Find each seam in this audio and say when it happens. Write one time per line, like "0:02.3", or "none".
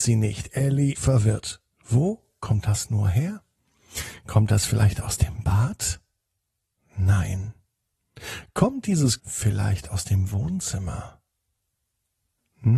0:00.9
0:09.2